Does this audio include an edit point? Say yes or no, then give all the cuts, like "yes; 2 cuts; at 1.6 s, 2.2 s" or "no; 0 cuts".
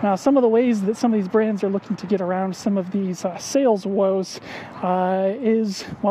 no; 0 cuts